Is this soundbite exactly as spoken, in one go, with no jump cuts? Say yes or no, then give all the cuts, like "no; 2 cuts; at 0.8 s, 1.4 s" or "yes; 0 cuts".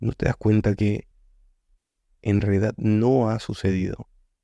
yes; 0 cuts